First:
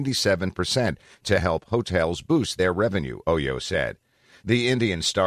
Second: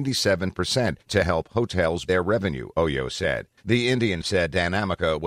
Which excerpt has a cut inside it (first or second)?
second